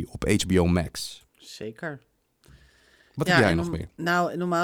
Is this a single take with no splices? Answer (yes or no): no